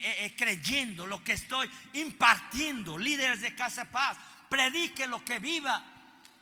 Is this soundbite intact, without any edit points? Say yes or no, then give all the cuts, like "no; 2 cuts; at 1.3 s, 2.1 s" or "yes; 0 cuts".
yes; 0 cuts